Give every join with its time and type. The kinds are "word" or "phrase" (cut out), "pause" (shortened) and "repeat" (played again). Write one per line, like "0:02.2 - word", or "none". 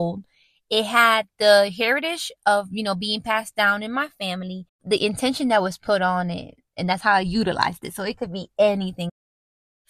none